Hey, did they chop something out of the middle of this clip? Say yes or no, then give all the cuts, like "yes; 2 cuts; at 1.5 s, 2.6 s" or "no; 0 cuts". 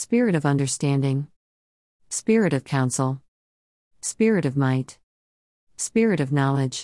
no; 0 cuts